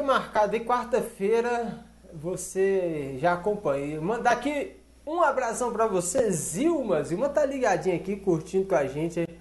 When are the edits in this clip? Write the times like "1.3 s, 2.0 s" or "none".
none